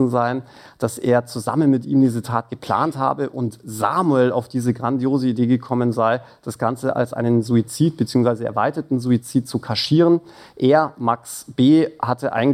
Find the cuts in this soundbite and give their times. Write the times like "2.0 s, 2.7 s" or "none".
none